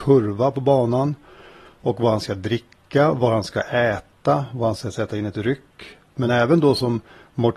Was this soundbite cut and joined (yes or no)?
no